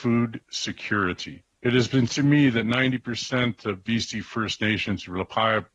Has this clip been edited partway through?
yes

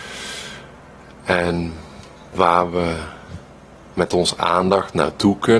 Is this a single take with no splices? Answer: yes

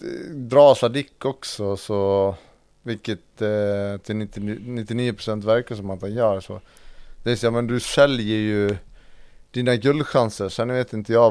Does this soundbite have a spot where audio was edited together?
no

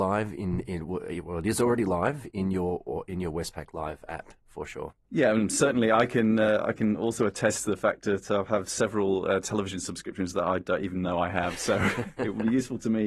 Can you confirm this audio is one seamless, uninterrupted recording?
no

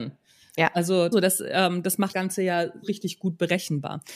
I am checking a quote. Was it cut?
yes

